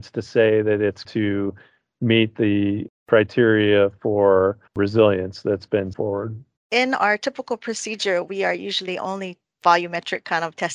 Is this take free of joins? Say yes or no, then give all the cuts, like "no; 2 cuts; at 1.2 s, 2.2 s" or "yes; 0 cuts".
no; 4 cuts; at 1.0 s, 4.7 s, 5.9 s, 6.6 s